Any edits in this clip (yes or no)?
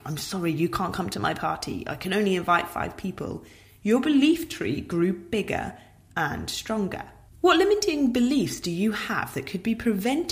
yes